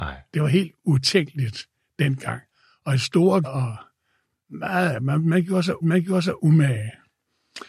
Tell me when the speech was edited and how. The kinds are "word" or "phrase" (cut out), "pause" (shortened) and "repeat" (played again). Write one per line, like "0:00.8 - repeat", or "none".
0:03.4 - word
0:05.8 - repeat